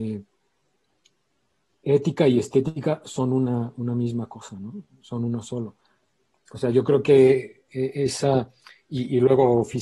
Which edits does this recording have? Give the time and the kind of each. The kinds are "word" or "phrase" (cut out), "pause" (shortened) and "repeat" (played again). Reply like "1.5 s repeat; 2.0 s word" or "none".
none